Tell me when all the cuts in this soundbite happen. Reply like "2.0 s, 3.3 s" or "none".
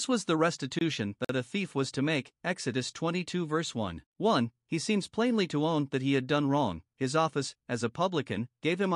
4.1 s

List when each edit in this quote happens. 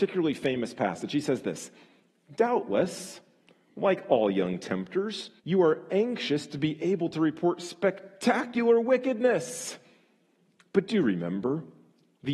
5.4 s

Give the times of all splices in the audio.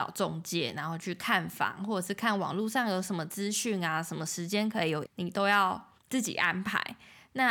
5.1 s, 6.0 s

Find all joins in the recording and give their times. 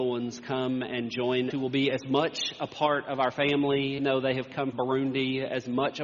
1.5 s, 4.0 s, 4.7 s

